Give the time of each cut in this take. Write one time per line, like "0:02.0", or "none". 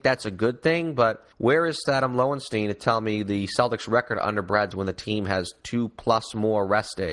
0:01.3
0:01.8
0:04.7